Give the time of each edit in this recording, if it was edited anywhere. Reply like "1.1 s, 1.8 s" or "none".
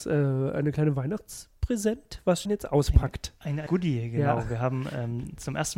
2.4 s, 3.7 s